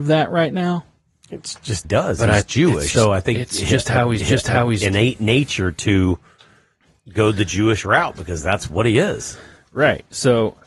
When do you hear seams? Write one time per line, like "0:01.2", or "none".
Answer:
0:01.8
0:02.9
0:04.2